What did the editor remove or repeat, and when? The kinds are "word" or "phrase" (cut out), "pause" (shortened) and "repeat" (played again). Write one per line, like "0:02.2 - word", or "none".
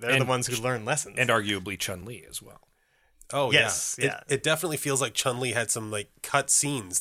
none